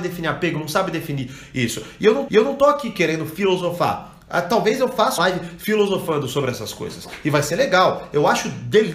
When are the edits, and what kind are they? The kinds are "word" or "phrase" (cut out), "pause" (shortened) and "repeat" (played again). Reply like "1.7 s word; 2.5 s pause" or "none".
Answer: 2.3 s repeat; 5.2 s word